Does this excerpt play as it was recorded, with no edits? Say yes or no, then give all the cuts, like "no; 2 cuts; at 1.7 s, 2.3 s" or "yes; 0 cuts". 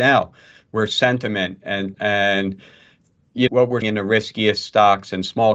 no; 3 cuts; at 1.9 s, 3.5 s, 3.8 s